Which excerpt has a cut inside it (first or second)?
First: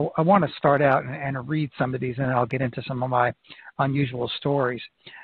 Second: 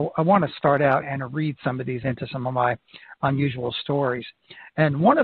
second